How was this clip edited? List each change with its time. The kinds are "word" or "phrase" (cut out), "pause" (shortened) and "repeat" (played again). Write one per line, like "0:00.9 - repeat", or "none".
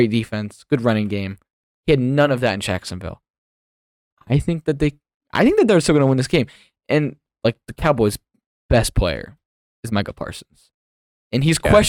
none